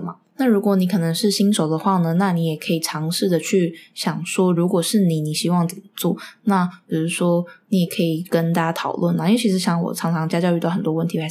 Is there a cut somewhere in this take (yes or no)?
no